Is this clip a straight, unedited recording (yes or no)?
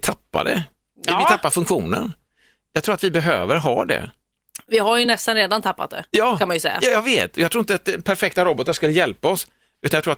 yes